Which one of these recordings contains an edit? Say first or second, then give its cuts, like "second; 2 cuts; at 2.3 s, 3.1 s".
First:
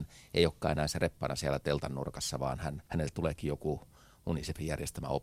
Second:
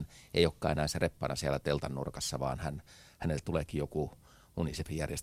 first; 1 cut; at 2.9 s